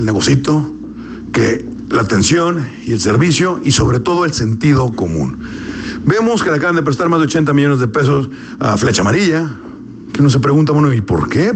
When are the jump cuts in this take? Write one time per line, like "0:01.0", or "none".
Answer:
none